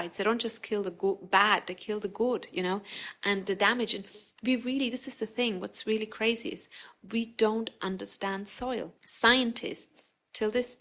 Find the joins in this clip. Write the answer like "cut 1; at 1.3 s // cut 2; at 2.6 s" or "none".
cut 1; at 9.0 s